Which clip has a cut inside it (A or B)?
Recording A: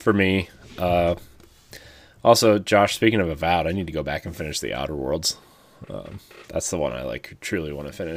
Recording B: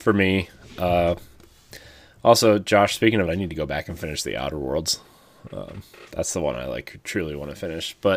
B